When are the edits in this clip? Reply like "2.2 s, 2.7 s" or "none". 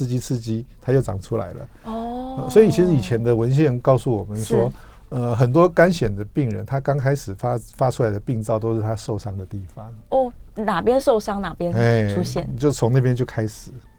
none